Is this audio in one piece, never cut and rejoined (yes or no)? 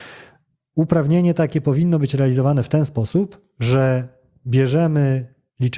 yes